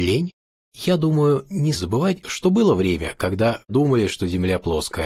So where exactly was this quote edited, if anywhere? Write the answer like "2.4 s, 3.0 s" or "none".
1.7 s, 3.7 s